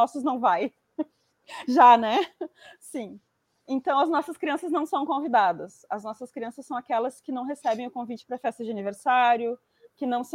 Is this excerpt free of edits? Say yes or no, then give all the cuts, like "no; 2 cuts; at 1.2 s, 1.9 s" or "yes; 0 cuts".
yes; 0 cuts